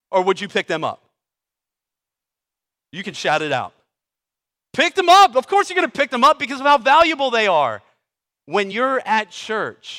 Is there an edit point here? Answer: no; 0 cuts

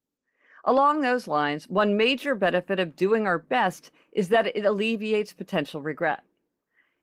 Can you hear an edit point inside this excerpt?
no; 0 cuts

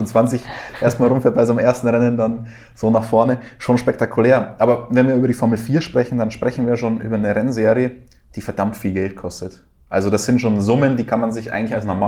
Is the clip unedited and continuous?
yes; 0 cuts

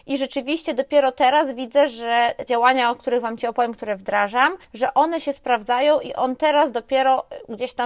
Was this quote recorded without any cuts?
no; 1 cut; at 2.5 s

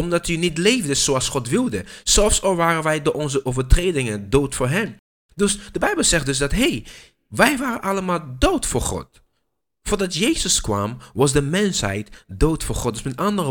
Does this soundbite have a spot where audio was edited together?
no; 0 cuts

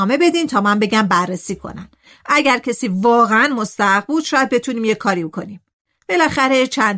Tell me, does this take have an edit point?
no; 0 cuts

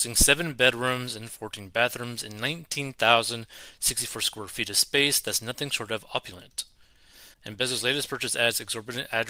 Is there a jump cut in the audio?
yes; 1 cut; at 7.3 s

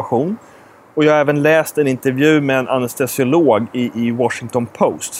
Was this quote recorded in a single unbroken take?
yes; 0 cuts

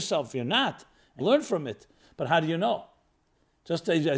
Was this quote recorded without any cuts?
no; 1 cut; at 1.2 s

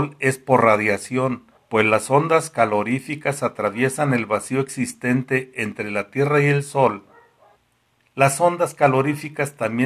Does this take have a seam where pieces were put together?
yes; 2 cuts; at 1.6 s, 7.6 s

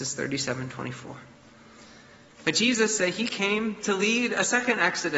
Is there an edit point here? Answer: yes; 1 cut; at 3.0 s

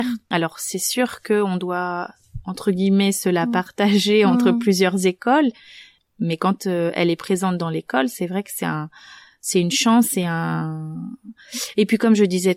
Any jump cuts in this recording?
no; 0 cuts

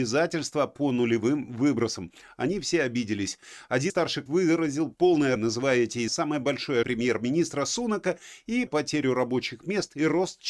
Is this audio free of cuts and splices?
no; 6 cuts; at 3.9 s, 4.3 s, 5.4 s, 6.1 s, 6.8 s, 8.7 s

